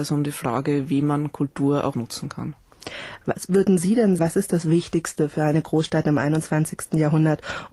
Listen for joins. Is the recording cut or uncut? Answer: cut